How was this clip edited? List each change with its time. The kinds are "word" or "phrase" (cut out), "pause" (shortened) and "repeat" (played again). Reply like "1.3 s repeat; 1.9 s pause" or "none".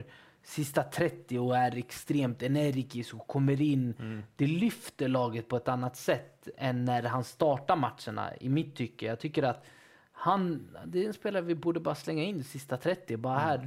none